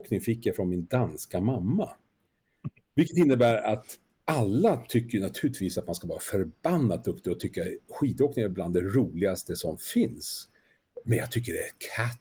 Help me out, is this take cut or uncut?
uncut